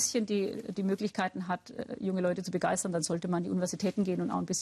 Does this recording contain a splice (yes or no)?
no